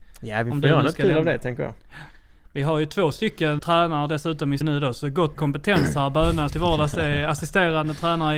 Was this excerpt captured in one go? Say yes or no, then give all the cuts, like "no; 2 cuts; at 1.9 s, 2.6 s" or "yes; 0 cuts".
no; 4 cuts; at 3.6 s, 4.6 s, 5.3 s, 6.5 s